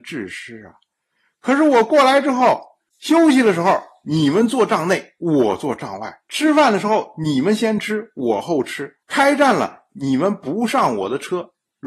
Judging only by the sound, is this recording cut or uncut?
cut